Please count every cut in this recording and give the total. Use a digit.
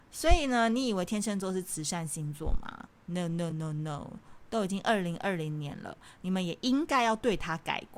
1